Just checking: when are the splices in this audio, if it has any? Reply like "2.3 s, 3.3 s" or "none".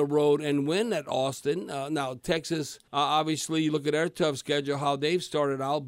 2.9 s